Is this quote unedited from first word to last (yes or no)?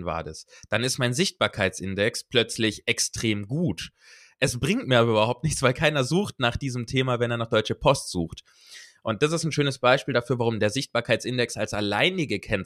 yes